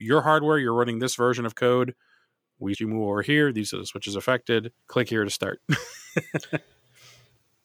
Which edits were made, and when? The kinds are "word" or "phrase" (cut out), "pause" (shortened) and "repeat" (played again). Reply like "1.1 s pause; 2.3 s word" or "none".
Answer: 2.7 s word; 4.8 s pause

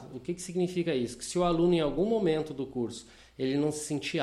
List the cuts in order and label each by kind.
none

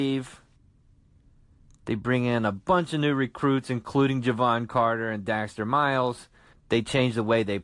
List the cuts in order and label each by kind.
6.5 s pause

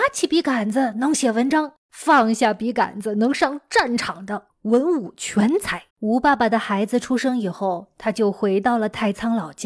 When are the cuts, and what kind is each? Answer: 1.8 s pause; 5.9 s pause

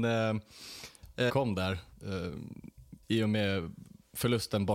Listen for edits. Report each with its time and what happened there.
1.3 s phrase; 3.0 s pause

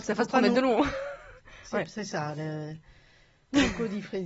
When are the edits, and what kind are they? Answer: none

